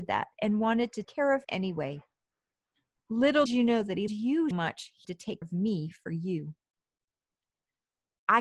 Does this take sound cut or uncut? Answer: cut